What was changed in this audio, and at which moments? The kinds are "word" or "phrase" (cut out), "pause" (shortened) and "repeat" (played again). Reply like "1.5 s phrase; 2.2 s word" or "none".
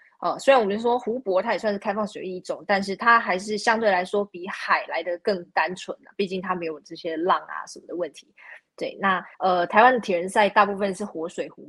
9.3 s pause